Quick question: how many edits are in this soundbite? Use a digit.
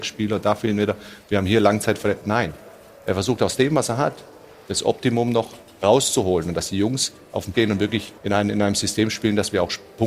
3